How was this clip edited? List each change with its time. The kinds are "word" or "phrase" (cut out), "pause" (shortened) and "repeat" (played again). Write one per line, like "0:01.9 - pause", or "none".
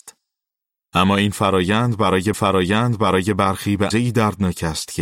0:02.3 - repeat
0:03.9 - word